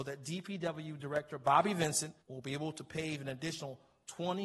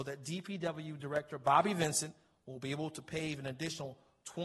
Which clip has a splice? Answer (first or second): first